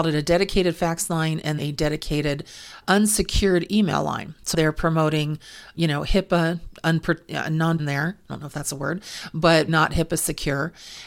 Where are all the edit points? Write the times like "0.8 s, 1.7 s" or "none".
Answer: 1.6 s, 2.8 s, 4.5 s, 5.7 s, 7.8 s, 9.7 s